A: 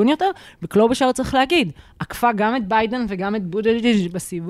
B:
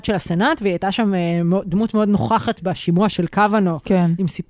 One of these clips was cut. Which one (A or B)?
B